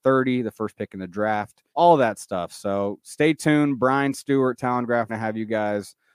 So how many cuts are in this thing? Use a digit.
2